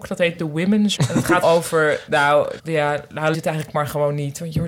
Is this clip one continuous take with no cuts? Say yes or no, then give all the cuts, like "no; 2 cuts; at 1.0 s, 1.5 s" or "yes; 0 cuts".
no; 4 cuts; at 1.0 s, 1.4 s, 2.6 s, 3.3 s